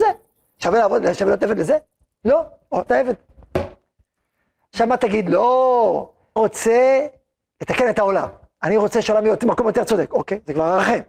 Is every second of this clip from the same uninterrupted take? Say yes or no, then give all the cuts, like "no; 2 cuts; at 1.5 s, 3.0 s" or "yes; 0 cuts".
no; 2 cuts; at 2.9 s, 6.4 s